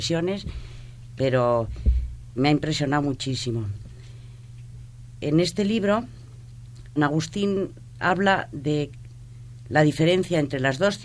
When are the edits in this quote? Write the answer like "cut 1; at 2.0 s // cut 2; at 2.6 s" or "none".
cut 1; at 2.4 s // cut 2; at 7.0 s // cut 3; at 8.0 s